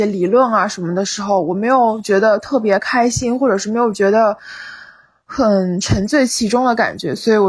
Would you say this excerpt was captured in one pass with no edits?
yes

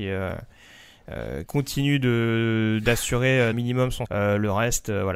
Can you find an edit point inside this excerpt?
yes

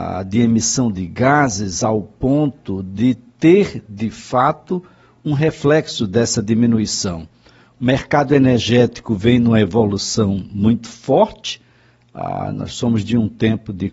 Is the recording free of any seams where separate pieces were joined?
yes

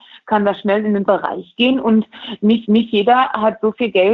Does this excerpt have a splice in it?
yes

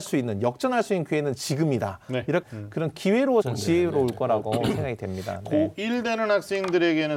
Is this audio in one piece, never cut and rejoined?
no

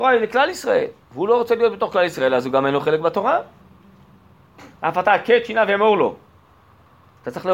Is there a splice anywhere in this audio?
yes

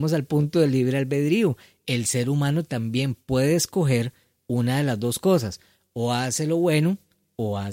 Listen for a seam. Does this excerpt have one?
no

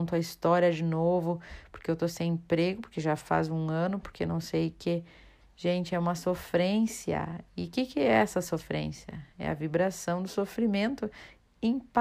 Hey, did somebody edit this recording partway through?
no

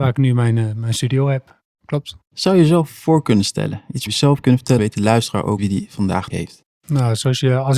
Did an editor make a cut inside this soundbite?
yes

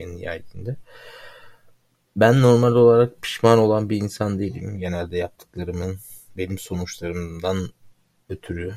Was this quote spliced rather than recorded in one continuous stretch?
no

